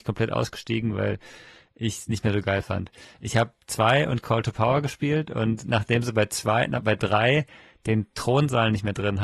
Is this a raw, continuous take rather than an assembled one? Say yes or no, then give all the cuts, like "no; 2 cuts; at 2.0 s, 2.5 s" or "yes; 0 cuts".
yes; 0 cuts